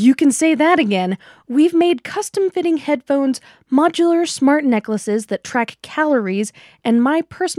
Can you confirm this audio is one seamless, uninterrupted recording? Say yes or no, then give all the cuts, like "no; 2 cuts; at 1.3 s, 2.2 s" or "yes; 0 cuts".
yes; 0 cuts